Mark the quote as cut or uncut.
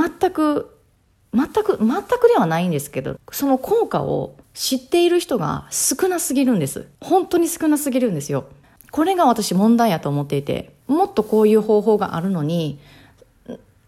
cut